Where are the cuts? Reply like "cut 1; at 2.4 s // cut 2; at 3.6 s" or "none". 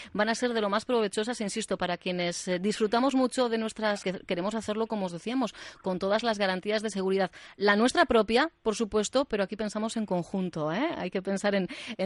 cut 1; at 4.0 s

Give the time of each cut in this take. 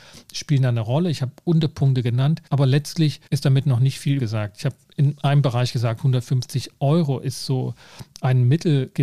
cut 1; at 2.5 s // cut 2; at 3.3 s // cut 3; at 4.2 s

